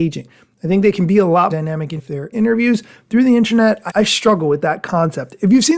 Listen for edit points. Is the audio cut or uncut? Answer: cut